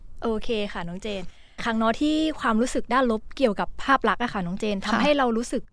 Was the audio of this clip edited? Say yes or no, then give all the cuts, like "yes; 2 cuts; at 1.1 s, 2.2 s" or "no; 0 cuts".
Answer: yes; 1 cut; at 1.6 s